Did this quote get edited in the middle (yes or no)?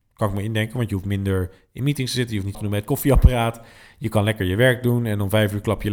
yes